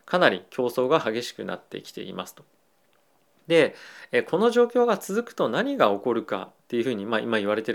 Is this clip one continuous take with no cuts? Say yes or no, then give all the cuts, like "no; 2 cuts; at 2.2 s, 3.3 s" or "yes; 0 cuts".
yes; 0 cuts